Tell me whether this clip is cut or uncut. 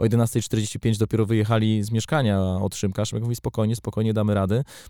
uncut